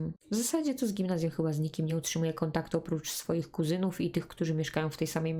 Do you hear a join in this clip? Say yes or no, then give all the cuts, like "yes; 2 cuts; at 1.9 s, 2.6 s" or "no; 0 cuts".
no; 0 cuts